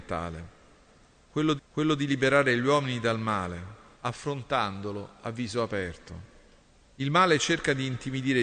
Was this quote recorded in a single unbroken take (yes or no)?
no